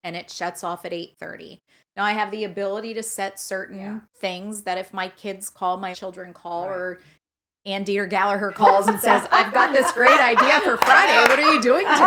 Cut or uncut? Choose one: cut